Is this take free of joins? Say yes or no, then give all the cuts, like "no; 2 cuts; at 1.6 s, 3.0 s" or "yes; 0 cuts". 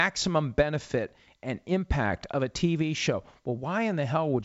yes; 0 cuts